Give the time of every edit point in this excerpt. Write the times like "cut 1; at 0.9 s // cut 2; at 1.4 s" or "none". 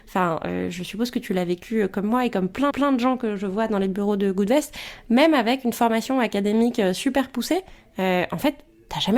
cut 1; at 2.7 s